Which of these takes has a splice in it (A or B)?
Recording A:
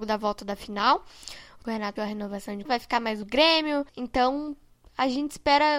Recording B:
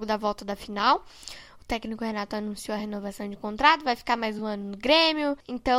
A